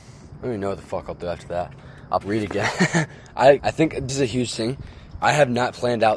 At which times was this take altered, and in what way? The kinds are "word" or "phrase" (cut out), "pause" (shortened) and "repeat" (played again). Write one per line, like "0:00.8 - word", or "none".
0:02.2 - word
0:03.6 - word
0:04.1 - word